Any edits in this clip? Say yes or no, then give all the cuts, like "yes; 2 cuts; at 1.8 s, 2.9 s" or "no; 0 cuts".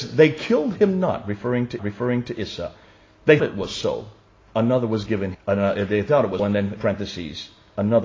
yes; 6 cuts; at 1.8 s, 3.4 s, 4.3 s, 5.3 s, 6.4 s, 6.8 s